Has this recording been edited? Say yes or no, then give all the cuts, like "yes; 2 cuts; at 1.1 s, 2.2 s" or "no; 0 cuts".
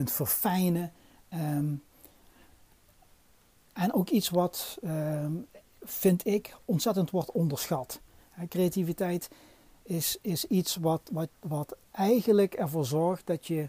no; 0 cuts